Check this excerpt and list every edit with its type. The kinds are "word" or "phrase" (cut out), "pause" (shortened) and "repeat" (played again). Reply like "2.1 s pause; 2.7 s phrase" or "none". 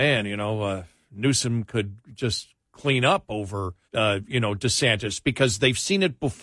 2.0 s pause; 3.9 s pause